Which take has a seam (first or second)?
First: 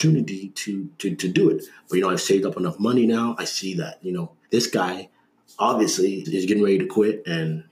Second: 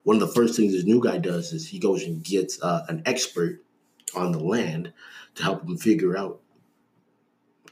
first